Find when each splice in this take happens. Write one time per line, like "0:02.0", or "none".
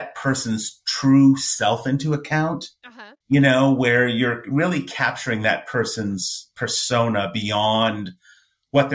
0:03.2